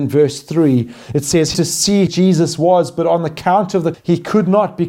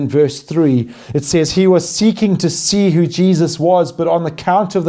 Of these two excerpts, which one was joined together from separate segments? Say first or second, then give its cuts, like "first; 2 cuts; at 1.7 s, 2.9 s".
first; 3 cuts; at 1.5 s, 2.1 s, 3.9 s